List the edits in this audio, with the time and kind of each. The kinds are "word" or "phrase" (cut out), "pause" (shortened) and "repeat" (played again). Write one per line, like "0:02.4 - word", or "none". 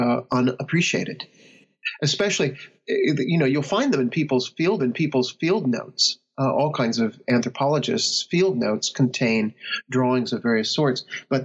0:04.8 - repeat